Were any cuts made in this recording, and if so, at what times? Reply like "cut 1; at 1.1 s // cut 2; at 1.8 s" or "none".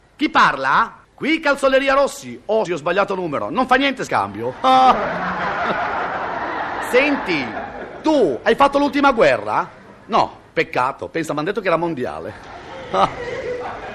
cut 1; at 1.0 s // cut 2; at 2.7 s // cut 3; at 4.1 s